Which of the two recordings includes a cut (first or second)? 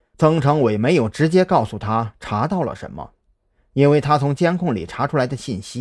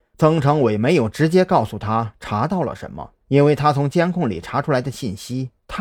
second